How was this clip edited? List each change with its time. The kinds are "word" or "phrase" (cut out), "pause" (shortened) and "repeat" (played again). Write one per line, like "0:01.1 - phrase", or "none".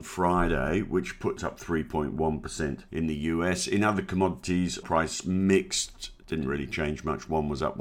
0:01.4 - phrase
0:04.8 - word